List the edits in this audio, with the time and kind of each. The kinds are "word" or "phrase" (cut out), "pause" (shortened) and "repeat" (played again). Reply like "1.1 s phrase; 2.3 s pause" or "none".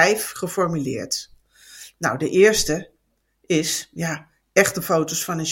none